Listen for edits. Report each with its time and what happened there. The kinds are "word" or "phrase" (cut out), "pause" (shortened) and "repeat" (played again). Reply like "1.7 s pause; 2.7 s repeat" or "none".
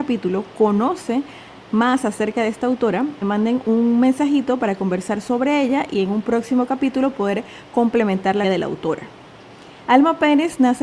3.2 s word; 8.4 s word